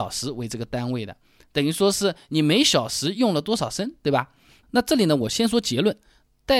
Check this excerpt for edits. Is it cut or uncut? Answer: uncut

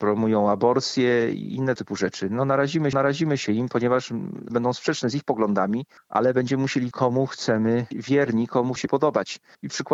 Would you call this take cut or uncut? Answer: cut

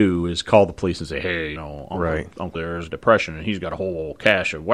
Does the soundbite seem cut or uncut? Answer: cut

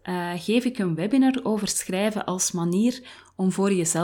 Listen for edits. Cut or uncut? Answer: uncut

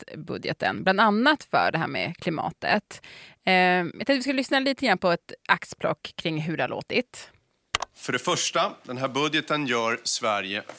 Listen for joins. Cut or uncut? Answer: uncut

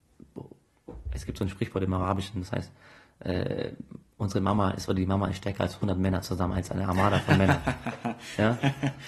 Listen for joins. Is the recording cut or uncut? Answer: uncut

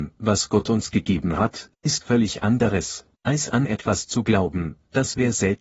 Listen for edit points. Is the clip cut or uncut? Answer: cut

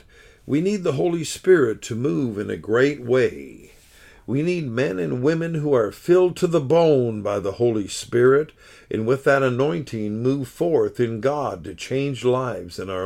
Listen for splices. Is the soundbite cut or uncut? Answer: uncut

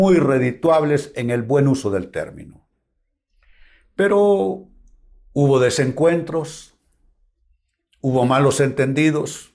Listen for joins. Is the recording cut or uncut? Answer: uncut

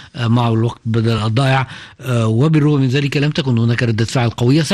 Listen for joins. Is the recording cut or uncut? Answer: uncut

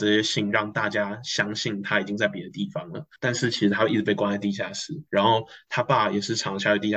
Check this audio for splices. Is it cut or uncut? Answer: cut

